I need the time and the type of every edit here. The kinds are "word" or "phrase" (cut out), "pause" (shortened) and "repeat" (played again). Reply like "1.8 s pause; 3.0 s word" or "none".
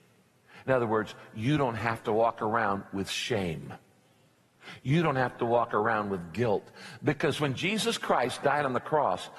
none